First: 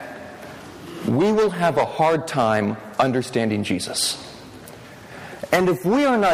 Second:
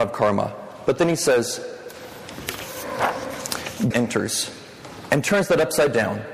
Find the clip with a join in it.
second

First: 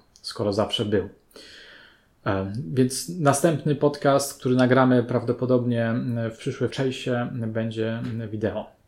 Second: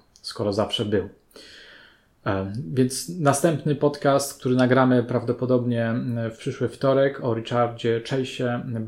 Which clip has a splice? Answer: first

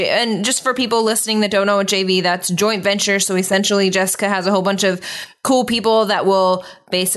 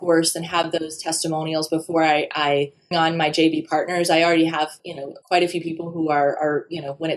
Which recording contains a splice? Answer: second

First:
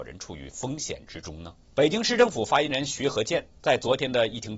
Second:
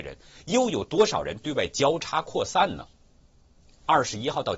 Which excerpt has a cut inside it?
first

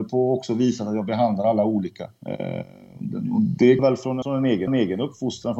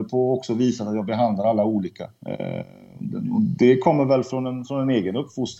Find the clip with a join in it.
first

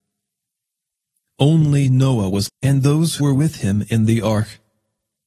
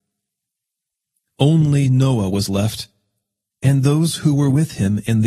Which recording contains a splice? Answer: first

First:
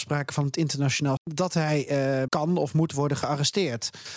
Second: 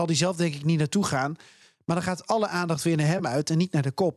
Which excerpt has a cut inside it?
first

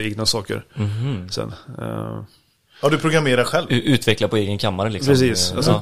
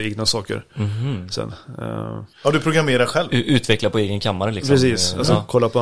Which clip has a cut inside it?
second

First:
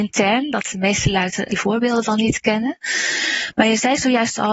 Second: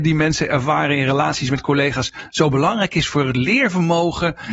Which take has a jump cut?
first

